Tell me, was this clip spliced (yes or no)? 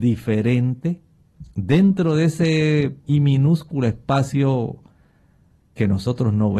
yes